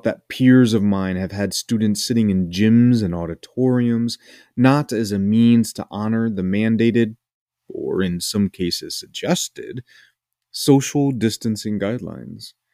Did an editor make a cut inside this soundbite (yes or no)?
no